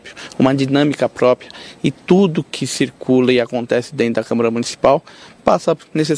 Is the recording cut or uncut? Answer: uncut